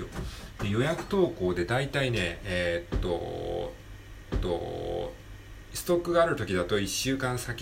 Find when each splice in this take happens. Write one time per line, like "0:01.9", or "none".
0:04.3